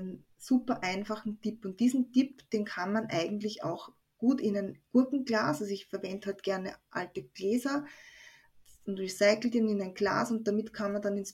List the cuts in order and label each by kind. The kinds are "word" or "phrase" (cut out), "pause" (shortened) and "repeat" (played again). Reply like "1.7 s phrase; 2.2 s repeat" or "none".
none